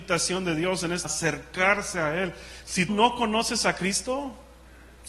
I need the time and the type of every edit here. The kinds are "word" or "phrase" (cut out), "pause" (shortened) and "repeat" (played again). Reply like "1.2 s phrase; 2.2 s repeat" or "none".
1.0 s word; 2.9 s word